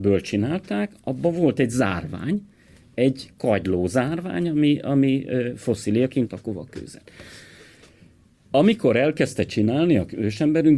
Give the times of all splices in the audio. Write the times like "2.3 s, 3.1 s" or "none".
6.3 s